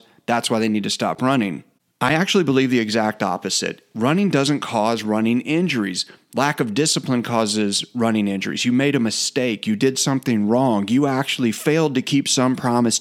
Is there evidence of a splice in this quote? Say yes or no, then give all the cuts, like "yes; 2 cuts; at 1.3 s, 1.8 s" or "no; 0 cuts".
no; 0 cuts